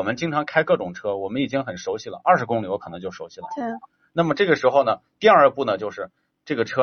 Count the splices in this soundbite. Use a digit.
0